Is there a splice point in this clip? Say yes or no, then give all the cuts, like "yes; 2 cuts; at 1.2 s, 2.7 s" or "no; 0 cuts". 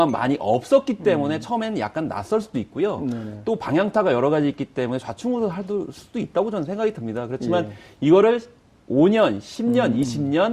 no; 0 cuts